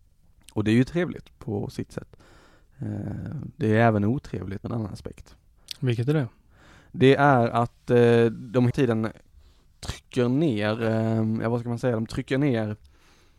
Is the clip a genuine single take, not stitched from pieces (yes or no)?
no